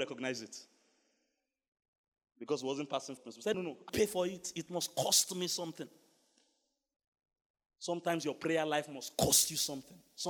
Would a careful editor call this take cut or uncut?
cut